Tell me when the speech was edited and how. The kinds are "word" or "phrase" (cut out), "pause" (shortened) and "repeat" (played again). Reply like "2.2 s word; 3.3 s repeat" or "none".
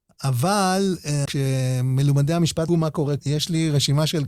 1.2 s phrase; 2.7 s phrase; 3.2 s word